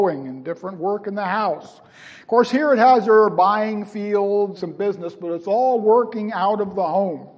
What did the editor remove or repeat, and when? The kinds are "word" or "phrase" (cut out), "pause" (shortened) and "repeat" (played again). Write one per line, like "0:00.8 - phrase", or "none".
0:04.6 - phrase